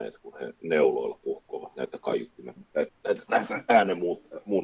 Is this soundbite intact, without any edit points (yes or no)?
no